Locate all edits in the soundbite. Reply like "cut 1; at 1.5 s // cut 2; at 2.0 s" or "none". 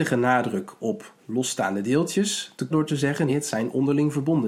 cut 1; at 1.2 s // cut 2; at 2.7 s // cut 3; at 3.3 s